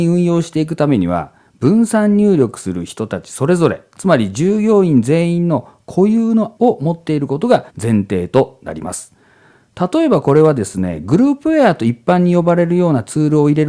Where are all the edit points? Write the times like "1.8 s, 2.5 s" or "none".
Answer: 6.6 s, 7.7 s